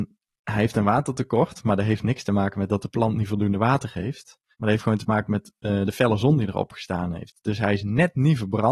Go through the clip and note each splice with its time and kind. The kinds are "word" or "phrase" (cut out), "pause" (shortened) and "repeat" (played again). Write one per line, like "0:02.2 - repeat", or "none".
0:04.5 - pause